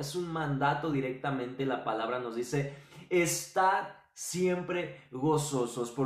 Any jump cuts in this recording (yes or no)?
no